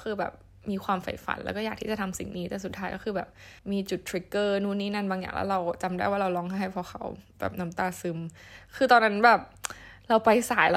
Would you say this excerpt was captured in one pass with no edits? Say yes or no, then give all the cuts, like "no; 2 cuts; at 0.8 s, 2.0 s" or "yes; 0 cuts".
no; 1 cut; at 3.6 s